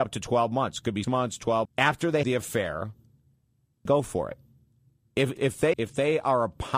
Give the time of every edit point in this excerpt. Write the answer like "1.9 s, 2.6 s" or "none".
1.0 s, 1.6 s, 2.2 s, 3.9 s, 5.4 s, 5.7 s